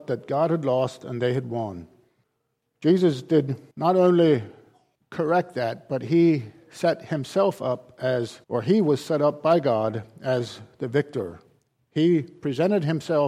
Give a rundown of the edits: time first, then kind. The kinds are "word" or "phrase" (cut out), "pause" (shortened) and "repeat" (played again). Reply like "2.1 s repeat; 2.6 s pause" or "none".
2.2 s pause; 3.7 s pause; 4.9 s pause; 8.4 s pause